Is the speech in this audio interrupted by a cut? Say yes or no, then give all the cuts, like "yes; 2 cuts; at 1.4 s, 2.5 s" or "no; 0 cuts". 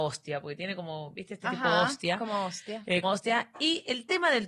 yes; 2 cuts; at 1.4 s, 3.0 s